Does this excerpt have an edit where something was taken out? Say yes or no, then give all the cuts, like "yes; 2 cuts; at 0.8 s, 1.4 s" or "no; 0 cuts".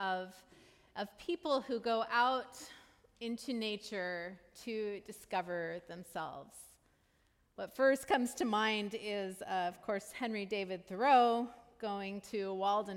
no; 0 cuts